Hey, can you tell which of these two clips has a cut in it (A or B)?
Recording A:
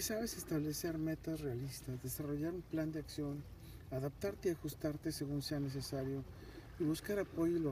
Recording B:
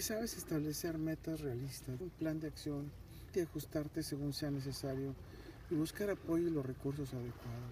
B